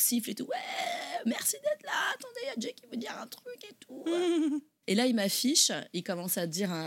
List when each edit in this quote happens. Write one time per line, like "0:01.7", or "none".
0:04.8